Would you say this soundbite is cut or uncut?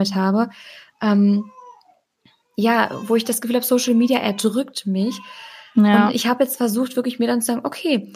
uncut